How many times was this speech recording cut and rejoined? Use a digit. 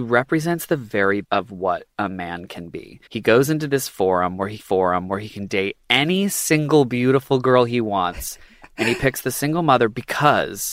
3